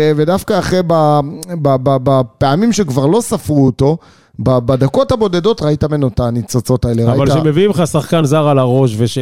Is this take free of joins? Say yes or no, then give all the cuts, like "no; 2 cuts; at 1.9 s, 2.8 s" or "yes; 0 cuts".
yes; 0 cuts